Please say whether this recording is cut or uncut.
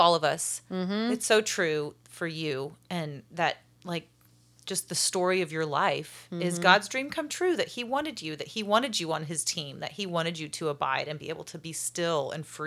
uncut